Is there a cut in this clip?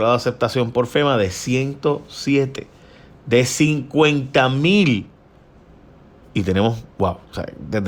no; 0 cuts

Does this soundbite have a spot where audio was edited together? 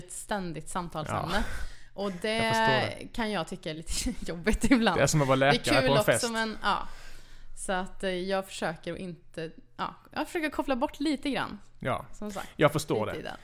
no; 0 cuts

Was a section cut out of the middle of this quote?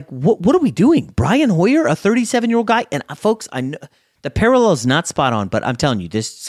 no; 0 cuts

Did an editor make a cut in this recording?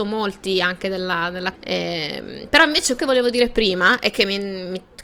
yes; 2 cuts; at 1.5 s, 3.0 s

